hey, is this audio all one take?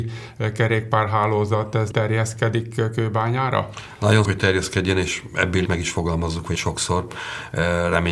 no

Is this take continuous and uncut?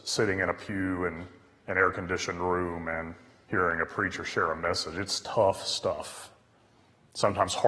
yes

